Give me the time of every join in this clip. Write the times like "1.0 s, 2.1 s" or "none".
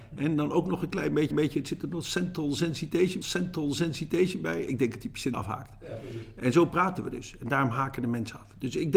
1.3 s, 3.2 s, 5.3 s